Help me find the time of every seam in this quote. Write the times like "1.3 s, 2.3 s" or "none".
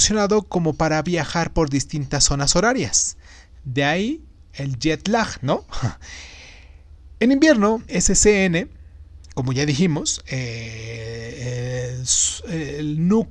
7.9 s